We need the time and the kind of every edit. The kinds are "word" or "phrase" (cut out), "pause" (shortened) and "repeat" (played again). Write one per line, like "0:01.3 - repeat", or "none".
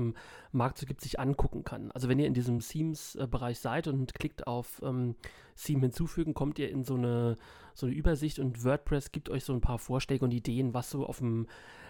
none